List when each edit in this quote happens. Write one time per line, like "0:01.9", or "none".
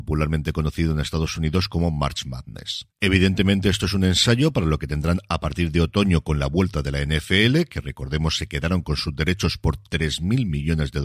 0:02.9